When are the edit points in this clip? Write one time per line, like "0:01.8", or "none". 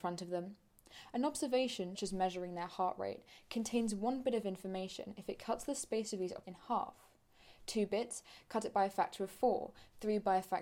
0:01.9
0:06.4